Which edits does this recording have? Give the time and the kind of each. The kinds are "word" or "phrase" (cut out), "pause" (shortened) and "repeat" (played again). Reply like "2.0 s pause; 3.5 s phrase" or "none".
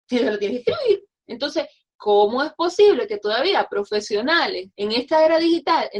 1.2 s pause; 4.7 s pause